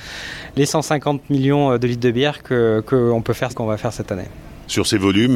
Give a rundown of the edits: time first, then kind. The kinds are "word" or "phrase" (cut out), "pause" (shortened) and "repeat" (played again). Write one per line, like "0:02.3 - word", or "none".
0:03.5 - phrase